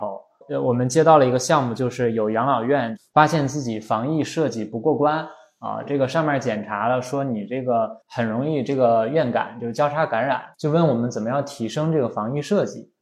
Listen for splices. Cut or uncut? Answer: cut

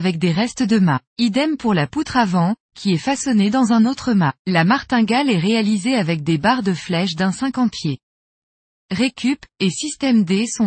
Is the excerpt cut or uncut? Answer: cut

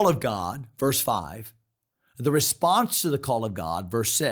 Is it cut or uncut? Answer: uncut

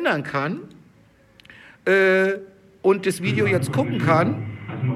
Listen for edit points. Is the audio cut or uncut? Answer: uncut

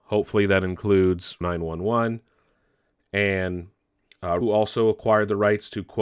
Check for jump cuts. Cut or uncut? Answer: cut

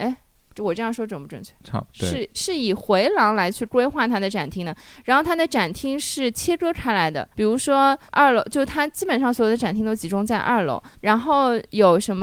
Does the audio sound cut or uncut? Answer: cut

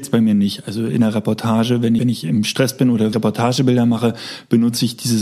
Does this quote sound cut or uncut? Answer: cut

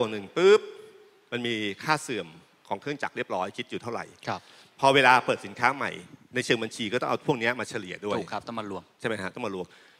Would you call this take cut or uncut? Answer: uncut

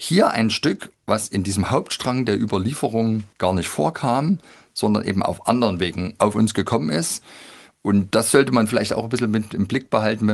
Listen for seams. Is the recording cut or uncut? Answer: cut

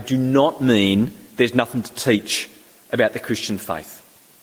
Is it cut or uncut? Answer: uncut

